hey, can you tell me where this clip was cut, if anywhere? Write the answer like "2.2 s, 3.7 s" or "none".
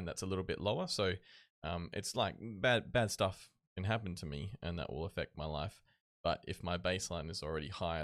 none